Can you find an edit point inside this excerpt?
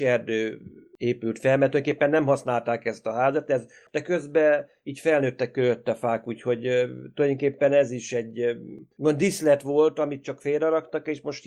no; 0 cuts

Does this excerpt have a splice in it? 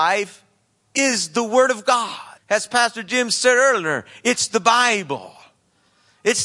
yes; 1 cut; at 2.4 s

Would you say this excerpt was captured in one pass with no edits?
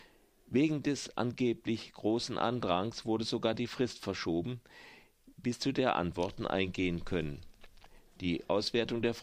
yes; 0 cuts

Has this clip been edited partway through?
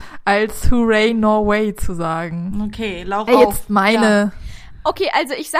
yes; 1 cut; at 3.3 s

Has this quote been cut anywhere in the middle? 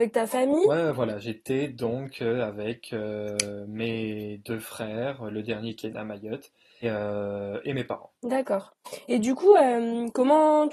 yes; 2 cuts; at 6.8 s, 8.2 s

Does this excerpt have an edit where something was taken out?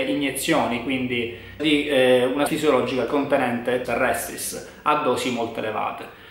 yes; 3 cuts; at 1.6 s, 2.5 s, 3.8 s

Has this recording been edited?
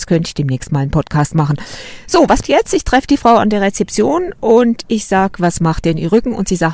yes; 1 cut; at 2.4 s

